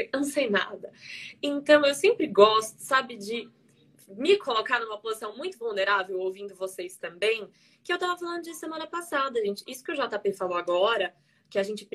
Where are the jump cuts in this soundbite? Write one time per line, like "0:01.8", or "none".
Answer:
none